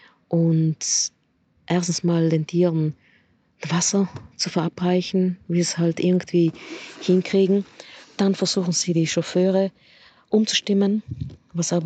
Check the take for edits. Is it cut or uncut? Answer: uncut